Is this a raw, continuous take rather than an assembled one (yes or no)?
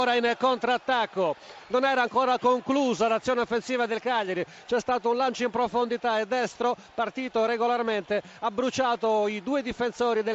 yes